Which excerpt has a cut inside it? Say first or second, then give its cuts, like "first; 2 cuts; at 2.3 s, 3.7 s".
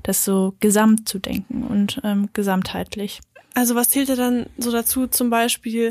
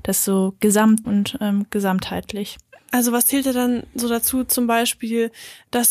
second; 1 cut; at 1.0 s